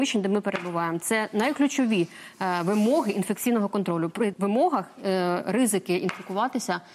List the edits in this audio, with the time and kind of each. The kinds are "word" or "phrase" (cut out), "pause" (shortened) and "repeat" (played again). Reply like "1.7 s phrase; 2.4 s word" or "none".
4.3 s word